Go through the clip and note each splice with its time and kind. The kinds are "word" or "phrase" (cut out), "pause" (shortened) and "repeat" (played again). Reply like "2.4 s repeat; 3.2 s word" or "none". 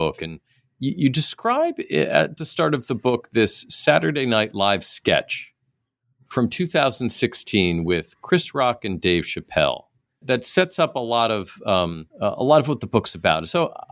2.4 s word; 10.2 s word; 12.1 s pause